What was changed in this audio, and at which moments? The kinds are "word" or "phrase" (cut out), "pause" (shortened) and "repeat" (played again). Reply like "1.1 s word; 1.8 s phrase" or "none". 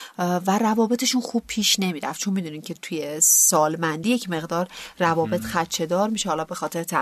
none